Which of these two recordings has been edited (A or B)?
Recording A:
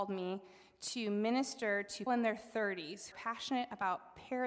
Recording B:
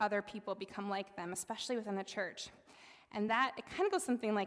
A